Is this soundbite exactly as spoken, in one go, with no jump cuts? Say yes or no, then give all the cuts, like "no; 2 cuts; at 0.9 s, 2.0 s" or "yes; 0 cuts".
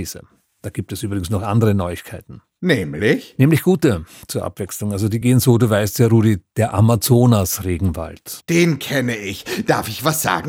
yes; 0 cuts